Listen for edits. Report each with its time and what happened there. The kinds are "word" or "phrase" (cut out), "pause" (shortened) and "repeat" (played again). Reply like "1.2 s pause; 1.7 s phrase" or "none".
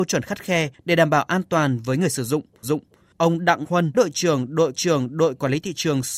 2.6 s repeat; 3.6 s word; 3.9 s word; 4.7 s repeat